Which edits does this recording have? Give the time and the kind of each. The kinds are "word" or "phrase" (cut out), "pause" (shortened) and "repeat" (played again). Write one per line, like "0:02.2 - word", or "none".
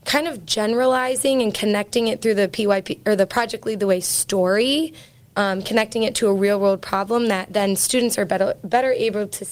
none

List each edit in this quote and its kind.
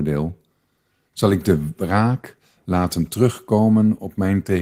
none

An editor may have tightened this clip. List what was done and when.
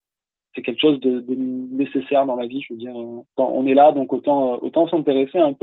0:03.3 - pause

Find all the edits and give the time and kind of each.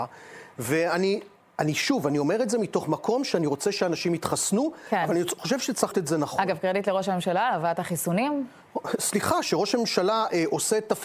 0:05.9 - word

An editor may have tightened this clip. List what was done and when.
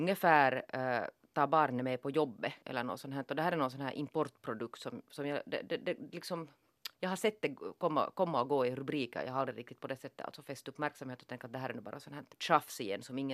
0:02.6 - pause
0:06.9 - pause
0:12.3 - pause

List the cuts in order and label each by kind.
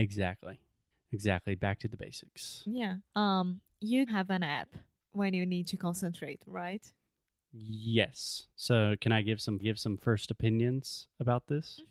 0:00.9 - pause
0:03.1 - pause
0:04.1 - word
0:05.0 - pause
0:08.5 - pause
0:09.6 - repeat

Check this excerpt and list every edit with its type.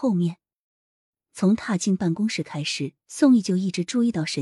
0:03.0 - pause

